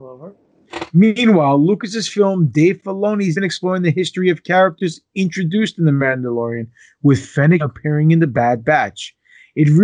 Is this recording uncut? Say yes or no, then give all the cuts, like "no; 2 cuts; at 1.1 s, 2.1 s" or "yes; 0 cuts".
no; 2 cuts; at 3.4 s, 7.6 s